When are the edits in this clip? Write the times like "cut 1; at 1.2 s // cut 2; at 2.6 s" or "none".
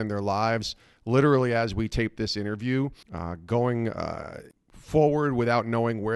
cut 1; at 3.0 s

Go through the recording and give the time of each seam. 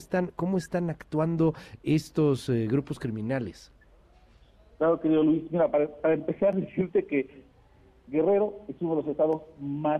none

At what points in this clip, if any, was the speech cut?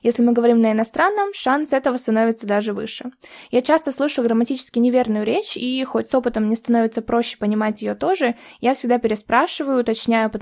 none

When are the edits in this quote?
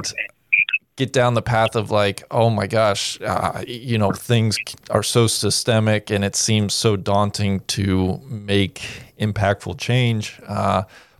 none

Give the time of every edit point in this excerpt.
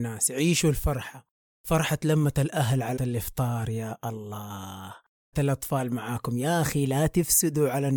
cut 1; at 3.0 s // cut 2; at 5.3 s

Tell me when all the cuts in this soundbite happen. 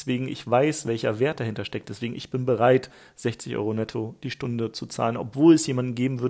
none

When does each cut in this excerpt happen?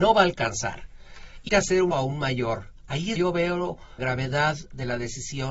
cut 1; at 1.5 s // cut 2; at 1.9 s // cut 3; at 3.2 s // cut 4; at 4.0 s

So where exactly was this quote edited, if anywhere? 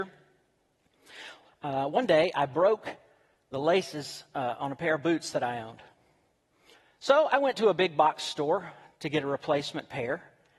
none

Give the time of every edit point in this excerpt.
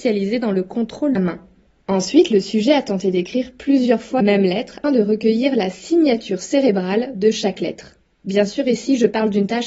cut 1; at 1.2 s // cut 2; at 4.2 s // cut 3; at 4.8 s

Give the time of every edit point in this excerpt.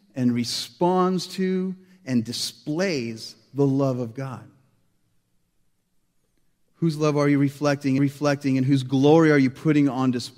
cut 1; at 8.0 s

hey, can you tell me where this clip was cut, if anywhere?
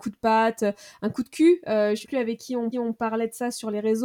cut 1; at 2.0 s // cut 2; at 2.7 s

